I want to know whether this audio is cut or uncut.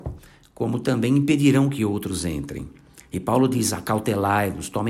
uncut